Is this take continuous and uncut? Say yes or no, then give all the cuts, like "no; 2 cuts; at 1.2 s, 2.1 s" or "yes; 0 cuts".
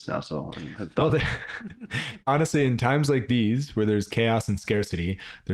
yes; 0 cuts